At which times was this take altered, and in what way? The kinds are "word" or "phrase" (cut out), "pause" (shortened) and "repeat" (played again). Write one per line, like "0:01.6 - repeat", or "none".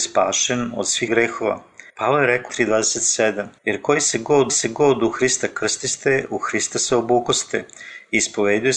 0:01.1 - word
0:01.9 - pause
0:02.5 - word
0:03.6 - pause
0:04.5 - repeat